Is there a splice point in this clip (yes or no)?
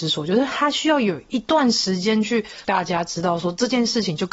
yes